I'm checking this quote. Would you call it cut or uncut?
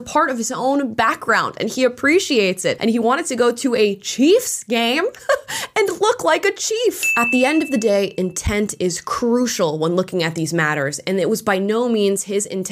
uncut